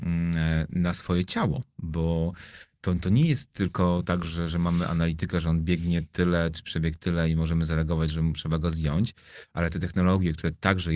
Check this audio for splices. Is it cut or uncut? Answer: uncut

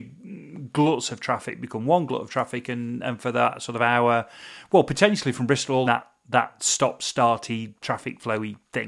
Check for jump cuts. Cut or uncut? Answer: cut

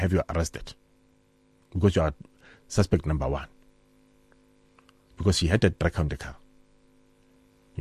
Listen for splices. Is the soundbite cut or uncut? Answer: uncut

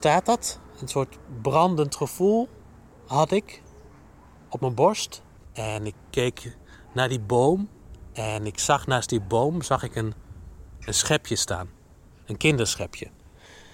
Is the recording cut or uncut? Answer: uncut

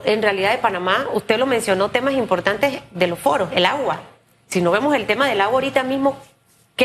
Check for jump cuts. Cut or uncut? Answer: uncut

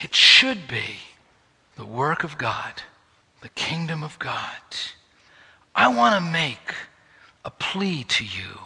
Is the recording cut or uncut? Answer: uncut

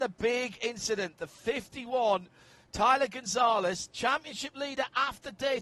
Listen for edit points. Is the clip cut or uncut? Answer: uncut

